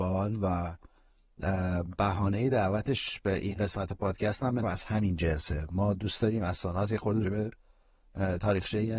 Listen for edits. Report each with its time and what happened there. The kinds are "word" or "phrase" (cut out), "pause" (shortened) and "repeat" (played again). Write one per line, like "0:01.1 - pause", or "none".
0:04.6 - word
0:07.2 - word